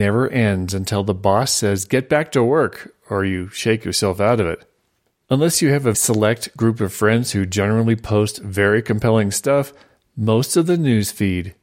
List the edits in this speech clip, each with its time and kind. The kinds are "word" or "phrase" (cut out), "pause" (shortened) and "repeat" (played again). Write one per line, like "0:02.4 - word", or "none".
0:05.9 - word

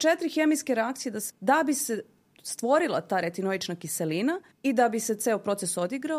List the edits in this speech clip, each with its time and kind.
0:01.3 - word
0:04.5 - pause

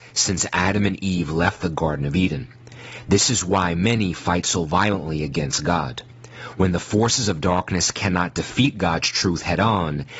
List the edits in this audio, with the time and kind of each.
none

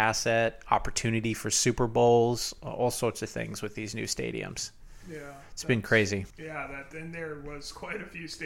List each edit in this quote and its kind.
0:06.3 - pause

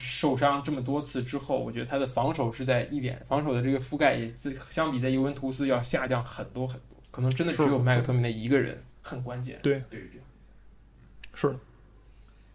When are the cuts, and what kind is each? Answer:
0:07.0 - pause

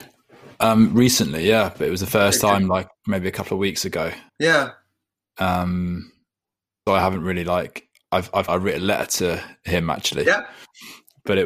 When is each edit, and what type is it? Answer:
0:04.3 - pause
0:06.9 - word
0:08.5 - phrase

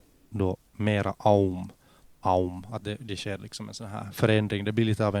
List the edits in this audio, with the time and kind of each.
none

